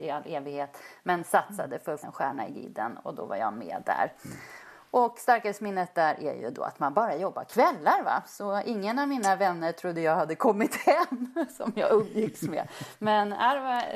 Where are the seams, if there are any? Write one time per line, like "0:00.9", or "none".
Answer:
0:02.0